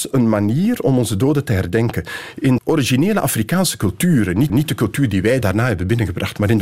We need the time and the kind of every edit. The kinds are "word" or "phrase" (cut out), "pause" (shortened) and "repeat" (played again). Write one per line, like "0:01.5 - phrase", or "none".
0:02.6 - word
0:04.5 - repeat
0:05.4 - word